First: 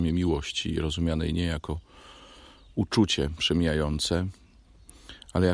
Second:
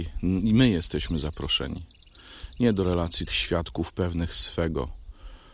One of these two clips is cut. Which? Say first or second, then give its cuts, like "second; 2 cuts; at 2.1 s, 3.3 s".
second; 1 cut; at 3.3 s